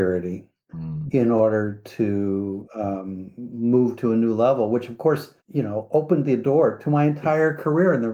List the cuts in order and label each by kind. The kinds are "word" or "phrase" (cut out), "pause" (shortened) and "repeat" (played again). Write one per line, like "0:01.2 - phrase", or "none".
0:05.4 - pause

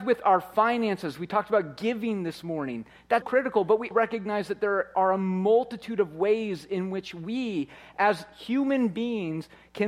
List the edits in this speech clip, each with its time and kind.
0:03.2 - word
0:03.9 - word

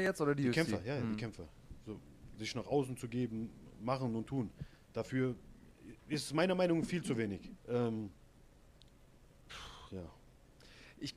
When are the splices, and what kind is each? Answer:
0:07.6 - pause

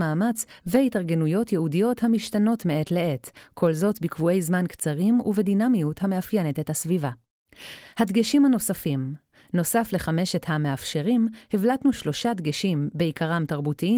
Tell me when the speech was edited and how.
none

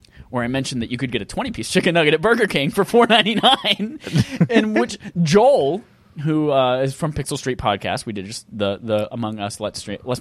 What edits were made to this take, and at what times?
none

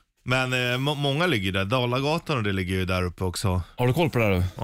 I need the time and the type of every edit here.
none

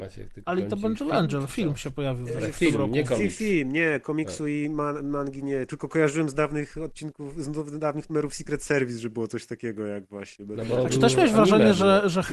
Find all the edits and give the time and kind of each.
none

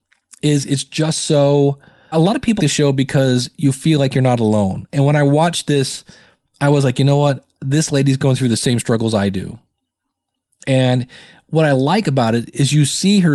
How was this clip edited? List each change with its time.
0:02.1 - word
0:02.6 - word

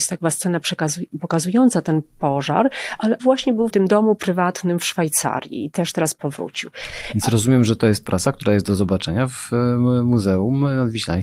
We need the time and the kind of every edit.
0:03.2 - word
0:03.7 - word

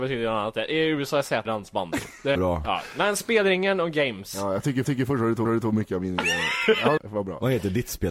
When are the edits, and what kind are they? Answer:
0:01.5 - phrase
0:02.4 - phrase
0:04.8 - repeat
0:05.5 - repeat
0:07.0 - word

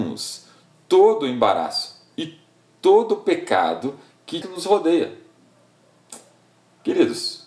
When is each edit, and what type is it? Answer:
0:04.4 - phrase

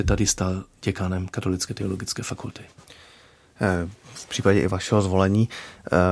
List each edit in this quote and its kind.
none

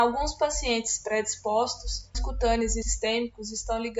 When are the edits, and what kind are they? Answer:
0:02.1 - phrase
0:02.8 - word

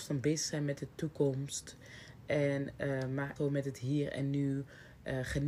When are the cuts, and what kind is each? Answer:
0:03.4 - word

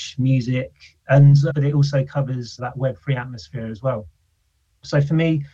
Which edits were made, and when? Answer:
0:01.5 - word
0:02.6 - word

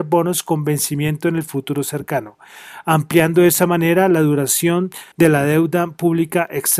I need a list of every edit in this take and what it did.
0:05.1 - pause

